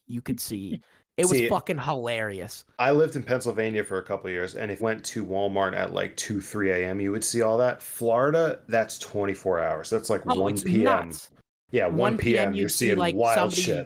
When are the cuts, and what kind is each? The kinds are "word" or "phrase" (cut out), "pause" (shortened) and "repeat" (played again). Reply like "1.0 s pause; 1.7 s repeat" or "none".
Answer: 4.8 s word